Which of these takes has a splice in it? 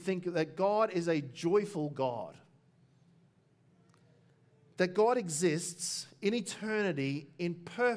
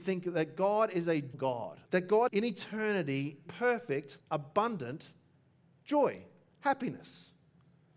second; 5 cuts; at 1.3 s, 1.8 s, 2.3 s, 3.5 s, 4.2 s

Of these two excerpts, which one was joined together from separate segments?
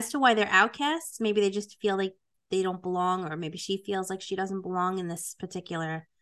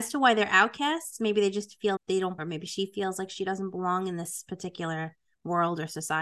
second; 2 cuts; at 2.0 s, 2.4 s

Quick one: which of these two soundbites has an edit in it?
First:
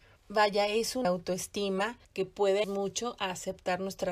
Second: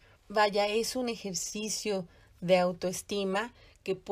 first; 3 cuts; at 1.0 s, 2.0 s, 2.6 s

